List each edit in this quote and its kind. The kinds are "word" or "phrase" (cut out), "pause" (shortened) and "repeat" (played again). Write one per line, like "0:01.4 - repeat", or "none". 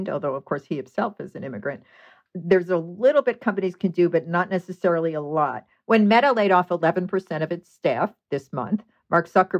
none

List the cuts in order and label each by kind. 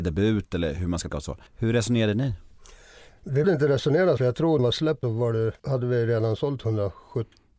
0:01.1 - word
0:01.5 - pause
0:03.4 - word
0:04.2 - phrase
0:04.6 - phrase
0:05.0 - word
0:05.6 - pause

